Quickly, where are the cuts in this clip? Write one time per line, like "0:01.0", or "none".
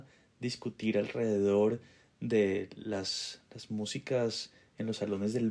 none